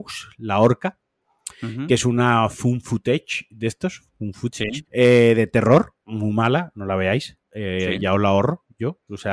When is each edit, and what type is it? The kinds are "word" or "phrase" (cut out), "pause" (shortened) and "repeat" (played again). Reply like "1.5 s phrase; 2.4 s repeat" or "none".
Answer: 4.9 s pause; 6.0 s pause